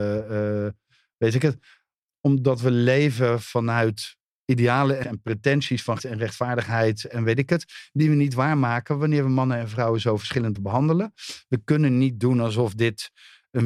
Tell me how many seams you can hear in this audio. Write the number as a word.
three